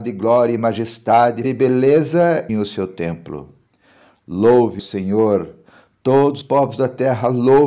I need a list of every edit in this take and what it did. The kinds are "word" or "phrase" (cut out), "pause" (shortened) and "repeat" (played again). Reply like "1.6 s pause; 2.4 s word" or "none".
1.4 s word; 2.5 s word; 4.8 s word; 6.4 s word